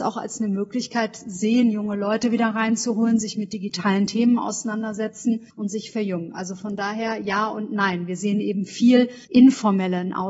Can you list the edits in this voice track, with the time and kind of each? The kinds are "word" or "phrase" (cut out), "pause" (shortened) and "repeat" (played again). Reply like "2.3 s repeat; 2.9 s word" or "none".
5.5 s pause; 9.2 s pause